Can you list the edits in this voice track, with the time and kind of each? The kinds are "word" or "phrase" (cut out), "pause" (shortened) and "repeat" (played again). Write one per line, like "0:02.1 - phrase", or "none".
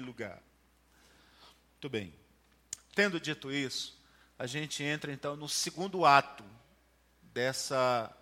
none